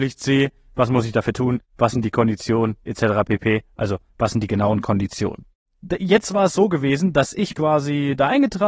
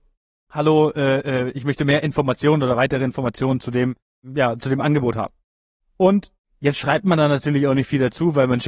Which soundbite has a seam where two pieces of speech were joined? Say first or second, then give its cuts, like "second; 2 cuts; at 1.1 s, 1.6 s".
first; 2 cuts; at 5.6 s, 7.5 s